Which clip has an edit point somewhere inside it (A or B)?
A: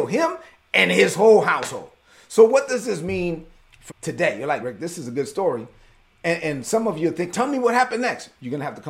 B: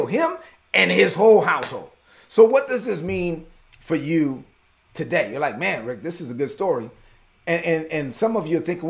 A